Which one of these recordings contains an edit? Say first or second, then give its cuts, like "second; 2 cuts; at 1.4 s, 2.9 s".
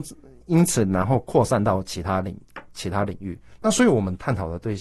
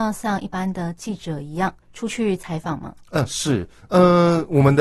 second; 1 cut; at 1.8 s